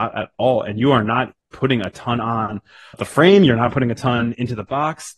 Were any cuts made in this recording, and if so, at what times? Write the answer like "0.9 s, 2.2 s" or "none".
2.9 s